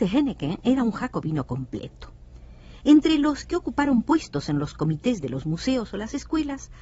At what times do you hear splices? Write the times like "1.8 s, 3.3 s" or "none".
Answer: none